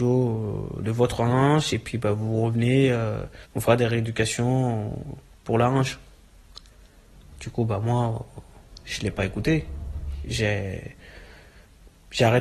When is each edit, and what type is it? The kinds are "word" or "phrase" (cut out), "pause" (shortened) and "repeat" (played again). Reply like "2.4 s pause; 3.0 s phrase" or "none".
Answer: 3.4 s pause; 5.3 s pause